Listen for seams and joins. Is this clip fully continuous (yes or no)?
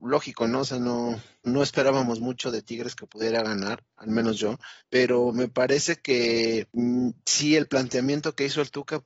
no